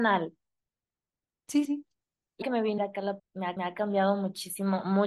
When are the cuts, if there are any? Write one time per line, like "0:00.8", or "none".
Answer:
0:01.6
0:02.4
0:02.8
0:03.2
0:03.6